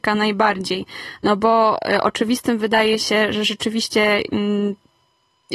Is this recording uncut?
yes; 0 cuts

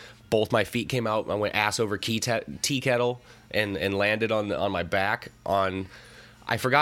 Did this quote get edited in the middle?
no; 0 cuts

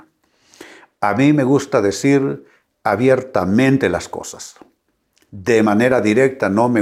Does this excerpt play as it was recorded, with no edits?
yes; 0 cuts

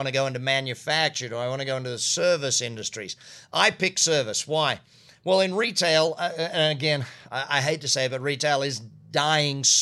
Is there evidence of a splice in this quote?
no; 0 cuts

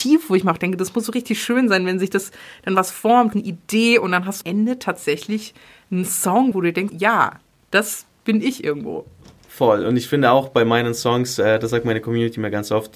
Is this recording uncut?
no; 4 cuts; at 3.3 s, 4.4 s, 6.5 s, 6.9 s

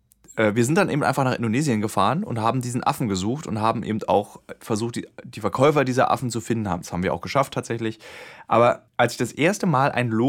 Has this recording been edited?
yes; 1 cut; at 8.9 s

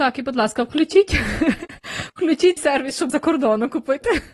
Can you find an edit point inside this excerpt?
yes; 2 cuts; at 2.6 s, 3.1 s

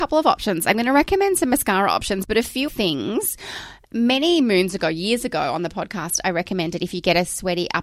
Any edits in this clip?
yes; 1 cut; at 2.7 s

